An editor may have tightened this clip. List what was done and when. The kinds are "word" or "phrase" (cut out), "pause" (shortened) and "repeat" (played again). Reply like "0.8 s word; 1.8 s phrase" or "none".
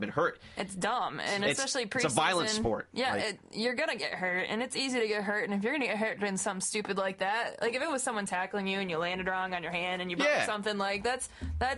none